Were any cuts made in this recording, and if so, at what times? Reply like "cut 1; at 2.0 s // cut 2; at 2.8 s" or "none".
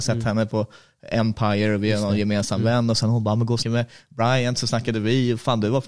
cut 1; at 3.6 s